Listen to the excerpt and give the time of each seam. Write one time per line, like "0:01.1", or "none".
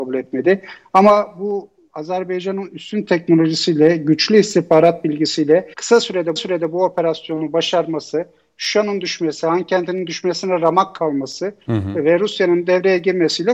0:05.7
0:06.4